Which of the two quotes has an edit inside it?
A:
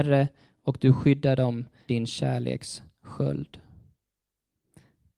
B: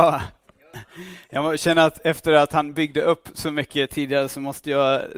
A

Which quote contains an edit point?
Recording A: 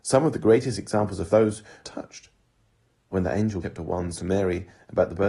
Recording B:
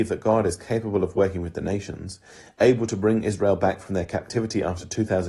A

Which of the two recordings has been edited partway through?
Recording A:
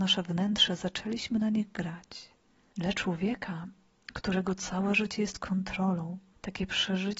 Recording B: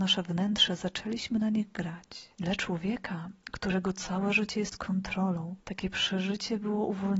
B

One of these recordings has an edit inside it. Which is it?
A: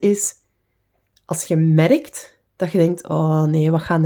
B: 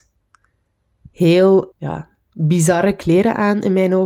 B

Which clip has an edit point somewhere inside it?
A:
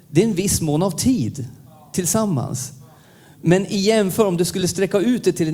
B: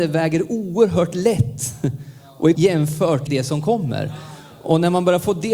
B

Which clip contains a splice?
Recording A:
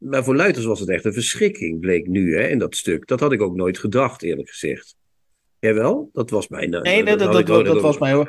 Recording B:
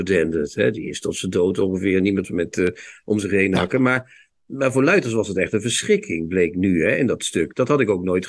B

